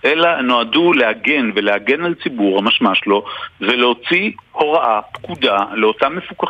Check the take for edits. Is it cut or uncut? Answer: uncut